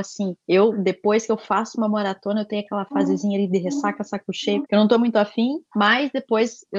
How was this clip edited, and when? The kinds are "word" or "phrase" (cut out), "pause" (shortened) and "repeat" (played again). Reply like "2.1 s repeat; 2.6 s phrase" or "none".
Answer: none